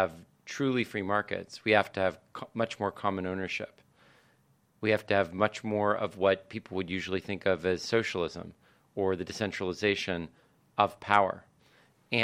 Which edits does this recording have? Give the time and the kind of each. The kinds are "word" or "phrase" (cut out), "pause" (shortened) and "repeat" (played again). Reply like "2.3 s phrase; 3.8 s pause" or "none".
none